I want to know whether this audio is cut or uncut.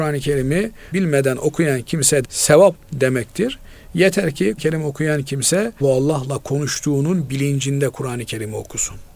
cut